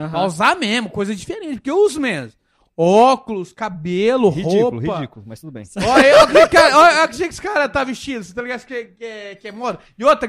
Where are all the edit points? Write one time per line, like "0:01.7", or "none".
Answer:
none